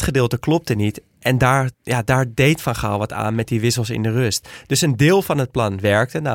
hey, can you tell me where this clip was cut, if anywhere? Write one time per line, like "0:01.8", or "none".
0:01.7